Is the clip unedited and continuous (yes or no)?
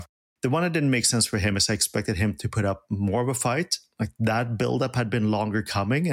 yes